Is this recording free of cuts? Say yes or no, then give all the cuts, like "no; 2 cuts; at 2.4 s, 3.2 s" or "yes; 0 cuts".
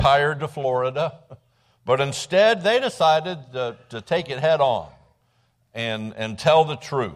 yes; 0 cuts